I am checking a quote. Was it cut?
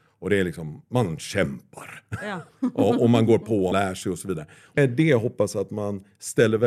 yes; 2 cuts; at 3.7 s, 4.8 s

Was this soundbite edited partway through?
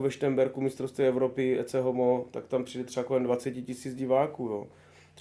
no; 0 cuts

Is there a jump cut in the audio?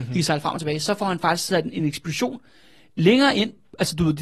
no; 0 cuts

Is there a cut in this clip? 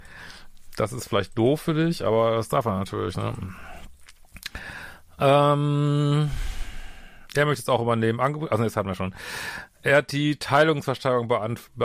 no; 0 cuts

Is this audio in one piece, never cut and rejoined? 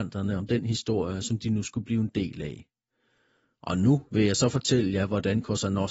yes; 0 cuts

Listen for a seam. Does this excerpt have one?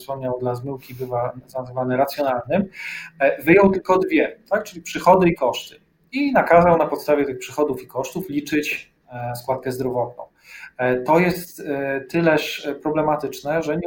no; 0 cuts

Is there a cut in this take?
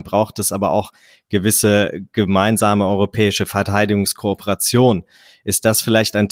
no; 0 cuts

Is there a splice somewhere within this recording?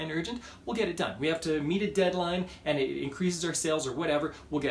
no; 0 cuts

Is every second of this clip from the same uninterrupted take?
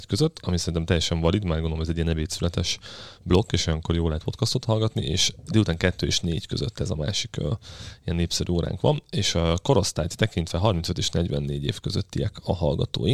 yes; 0 cuts

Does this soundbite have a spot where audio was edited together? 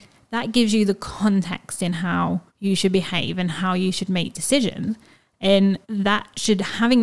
yes; 2 cuts; at 2.5 s, 5.8 s

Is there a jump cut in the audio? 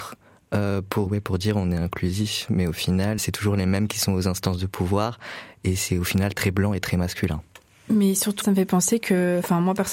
yes; 4 cuts; at 1.1 s, 3.2 s, 7.7 s, 8.4 s

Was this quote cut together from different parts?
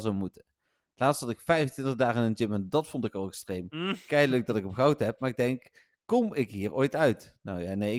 no; 0 cuts

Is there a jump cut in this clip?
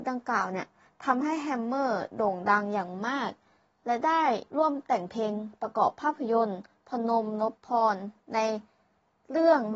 yes; 1 cut; at 4.5 s

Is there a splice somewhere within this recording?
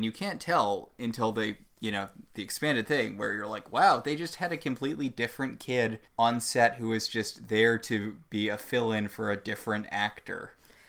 yes; 1 cut; at 6.1 s

